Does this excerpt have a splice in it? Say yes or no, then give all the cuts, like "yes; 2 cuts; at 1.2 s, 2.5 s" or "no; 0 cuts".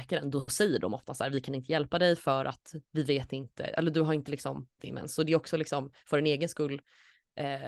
yes; 1 cut; at 4.8 s